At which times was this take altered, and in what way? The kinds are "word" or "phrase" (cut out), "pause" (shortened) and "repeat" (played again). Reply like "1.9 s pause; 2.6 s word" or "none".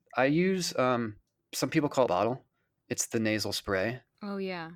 2.1 s phrase; 2.7 s pause

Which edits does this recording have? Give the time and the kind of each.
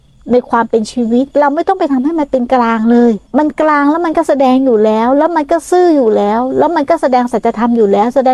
1.3 s pause; 3.3 s pause

